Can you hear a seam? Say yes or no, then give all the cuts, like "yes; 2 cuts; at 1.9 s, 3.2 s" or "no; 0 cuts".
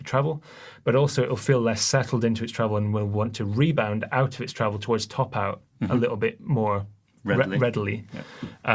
no; 0 cuts